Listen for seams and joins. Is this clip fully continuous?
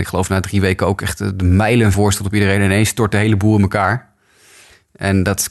no; 1 cut; at 1.9 s

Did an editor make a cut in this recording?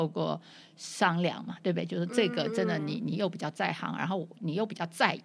no; 0 cuts

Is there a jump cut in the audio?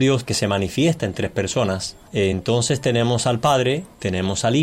no; 0 cuts

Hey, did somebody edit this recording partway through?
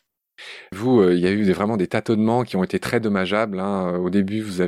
no; 0 cuts

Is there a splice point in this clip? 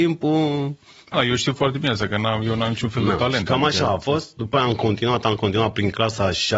yes; 1 cut; at 1.1 s

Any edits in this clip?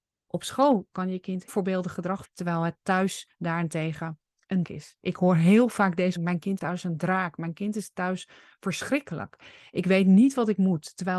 yes; 5 cuts; at 1.5 s, 2.2 s, 4.6 s, 6.2 s, 6.6 s

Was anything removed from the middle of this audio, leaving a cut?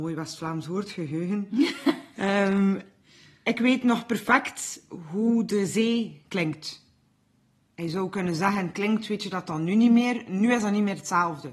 no; 0 cuts

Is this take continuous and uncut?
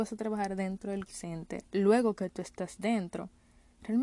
no; 2 cuts; at 1.1 s, 1.7 s

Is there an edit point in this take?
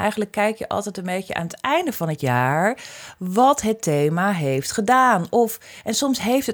no; 0 cuts

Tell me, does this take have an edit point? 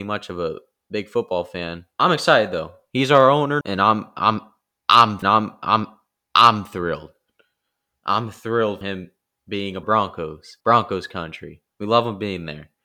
yes; 7 cuts; at 1.9 s, 3.6 s, 5.2 s, 8.8 s, 9.8 s, 10.6 s, 11.7 s

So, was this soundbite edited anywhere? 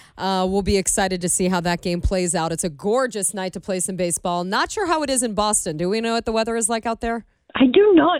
no; 0 cuts

